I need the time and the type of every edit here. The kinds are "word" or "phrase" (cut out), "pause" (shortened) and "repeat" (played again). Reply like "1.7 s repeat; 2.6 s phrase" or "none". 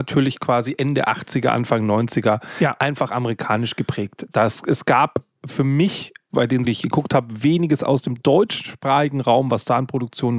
6.3 s word; 6.6 s word